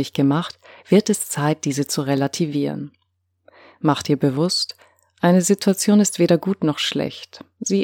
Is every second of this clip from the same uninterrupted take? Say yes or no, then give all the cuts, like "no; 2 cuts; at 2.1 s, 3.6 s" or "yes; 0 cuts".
yes; 0 cuts